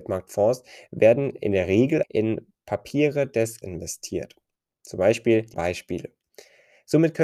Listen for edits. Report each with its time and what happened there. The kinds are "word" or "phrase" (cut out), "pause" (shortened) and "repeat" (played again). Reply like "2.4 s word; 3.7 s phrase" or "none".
2.0 s word; 3.6 s word; 5.5 s word